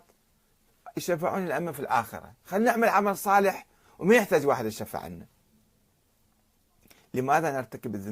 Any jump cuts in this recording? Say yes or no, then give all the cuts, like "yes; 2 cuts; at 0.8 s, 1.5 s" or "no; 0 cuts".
no; 0 cuts